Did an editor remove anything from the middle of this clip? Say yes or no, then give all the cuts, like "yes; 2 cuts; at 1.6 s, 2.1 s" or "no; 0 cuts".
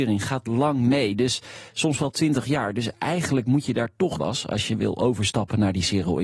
yes; 1 cut; at 4.2 s